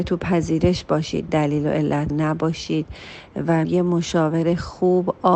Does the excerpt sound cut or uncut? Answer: cut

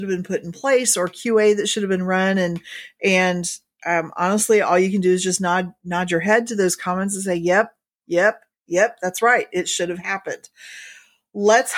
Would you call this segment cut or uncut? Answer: uncut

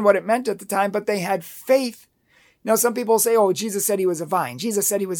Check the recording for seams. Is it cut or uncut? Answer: uncut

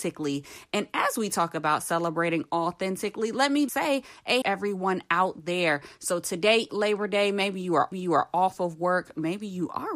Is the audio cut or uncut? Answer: cut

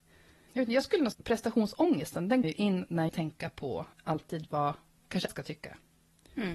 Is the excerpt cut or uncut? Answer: cut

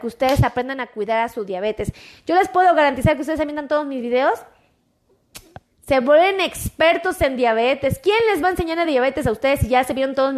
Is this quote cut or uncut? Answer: uncut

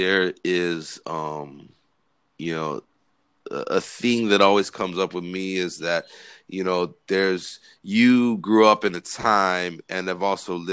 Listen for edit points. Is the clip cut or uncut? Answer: uncut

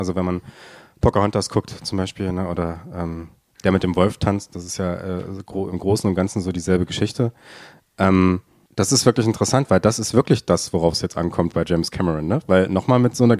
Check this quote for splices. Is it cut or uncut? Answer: cut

